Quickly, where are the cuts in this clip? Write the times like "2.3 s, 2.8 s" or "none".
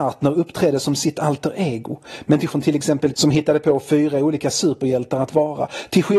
2.5 s, 3.1 s